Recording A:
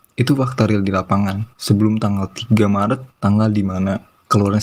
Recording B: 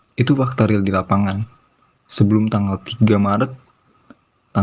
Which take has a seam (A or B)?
A